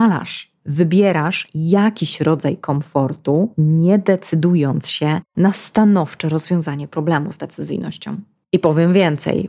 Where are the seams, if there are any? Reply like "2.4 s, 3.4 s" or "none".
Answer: none